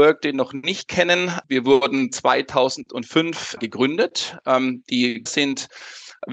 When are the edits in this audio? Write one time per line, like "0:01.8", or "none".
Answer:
0:03.6
0:05.3